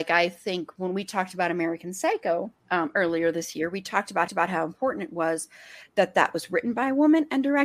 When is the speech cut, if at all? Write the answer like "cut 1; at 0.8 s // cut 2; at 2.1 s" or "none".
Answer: cut 1; at 2.6 s // cut 2; at 4.3 s